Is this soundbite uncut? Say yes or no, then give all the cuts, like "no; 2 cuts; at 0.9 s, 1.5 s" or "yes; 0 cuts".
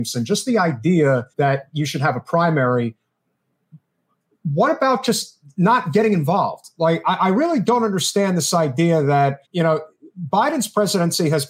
no; 2 cuts; at 1.3 s, 9.4 s